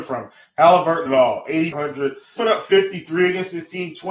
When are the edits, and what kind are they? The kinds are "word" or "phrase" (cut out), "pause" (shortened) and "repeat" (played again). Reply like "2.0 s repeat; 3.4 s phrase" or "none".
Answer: 1.1 s phrase; 1.7 s word; 2.4 s word